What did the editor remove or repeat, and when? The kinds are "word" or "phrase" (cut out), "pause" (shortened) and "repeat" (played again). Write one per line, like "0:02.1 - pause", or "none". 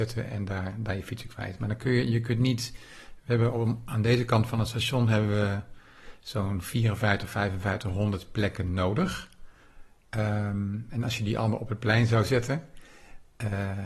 none